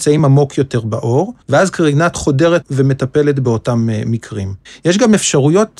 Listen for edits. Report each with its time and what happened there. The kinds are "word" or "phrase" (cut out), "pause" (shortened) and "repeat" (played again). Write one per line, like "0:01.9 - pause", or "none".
0:01.4 - pause
0:02.1 - word
0:02.6 - word
0:04.7 - pause

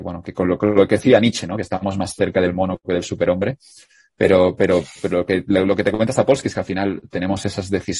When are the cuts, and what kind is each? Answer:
none

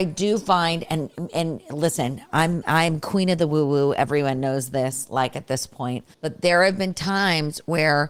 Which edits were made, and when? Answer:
0:06.1 - pause

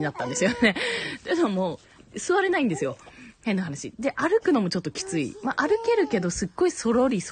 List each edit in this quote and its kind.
0:02.0 - pause

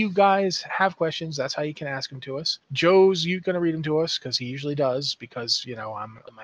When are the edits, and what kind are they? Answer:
0:02.6 - pause

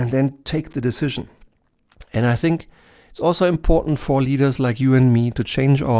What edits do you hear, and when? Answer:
none

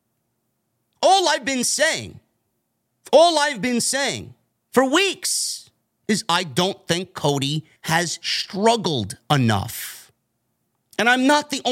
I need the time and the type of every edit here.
0:07.8 - pause

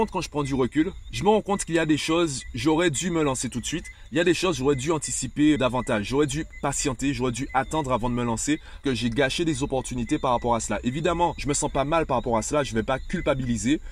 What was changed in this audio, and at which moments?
0:05.6 - word
0:08.8 - word

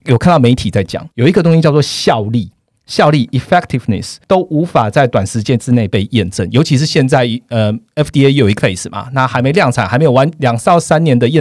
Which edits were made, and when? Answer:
0:01.1 - pause
0:04.2 - pause
0:08.6 - word

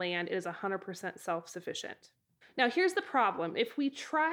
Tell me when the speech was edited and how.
0:02.4 - pause

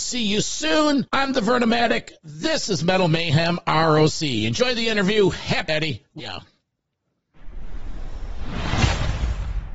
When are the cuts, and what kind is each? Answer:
0:01.1 - pause
0:05.7 - word
0:06.2 - phrase

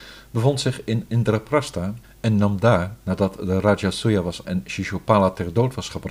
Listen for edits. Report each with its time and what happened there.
0:04.4 - word

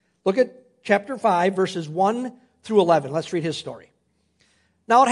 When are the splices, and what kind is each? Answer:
none

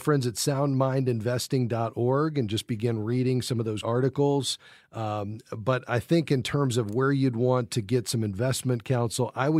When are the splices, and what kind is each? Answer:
0:03.8 - word

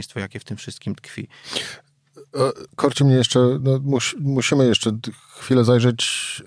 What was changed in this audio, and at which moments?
none

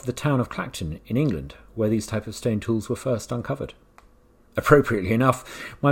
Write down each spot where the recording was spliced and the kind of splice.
none

